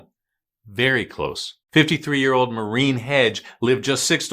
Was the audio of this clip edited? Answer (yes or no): yes